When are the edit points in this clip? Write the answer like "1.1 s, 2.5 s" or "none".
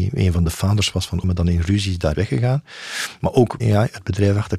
1.2 s, 2.1 s, 3.6 s